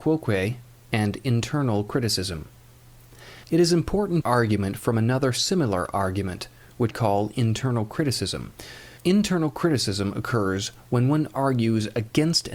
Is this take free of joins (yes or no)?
no